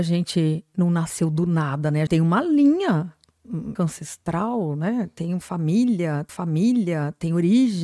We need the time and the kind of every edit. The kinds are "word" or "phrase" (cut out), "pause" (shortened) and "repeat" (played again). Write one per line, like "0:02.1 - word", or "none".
0:02.1 - word
0:03.8 - word
0:06.3 - repeat